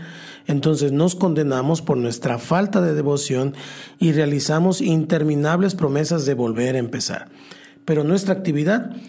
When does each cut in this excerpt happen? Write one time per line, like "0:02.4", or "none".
none